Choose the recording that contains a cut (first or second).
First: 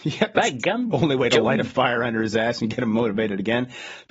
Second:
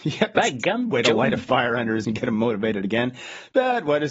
second